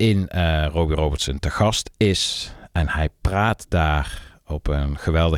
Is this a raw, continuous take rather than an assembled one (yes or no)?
yes